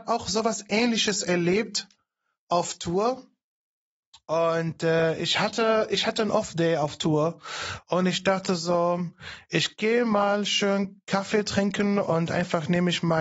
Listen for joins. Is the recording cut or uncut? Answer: uncut